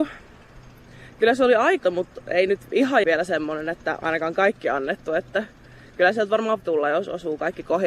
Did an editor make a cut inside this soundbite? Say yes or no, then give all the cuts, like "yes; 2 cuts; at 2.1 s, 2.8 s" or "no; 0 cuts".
yes; 4 cuts; at 1.8 s, 3.0 s, 4.0 s, 6.6 s